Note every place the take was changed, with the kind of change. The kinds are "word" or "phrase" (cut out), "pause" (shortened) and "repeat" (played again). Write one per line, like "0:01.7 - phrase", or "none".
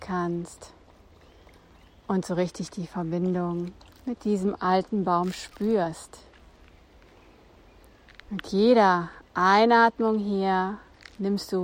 0:03.9 - pause

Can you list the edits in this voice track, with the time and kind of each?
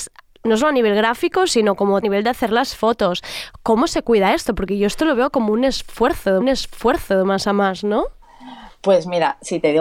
0:02.0 - phrase
0:06.4 - repeat

